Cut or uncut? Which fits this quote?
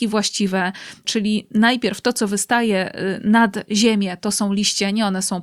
uncut